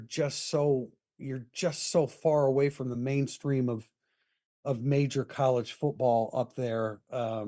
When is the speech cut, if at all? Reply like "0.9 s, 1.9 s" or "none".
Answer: none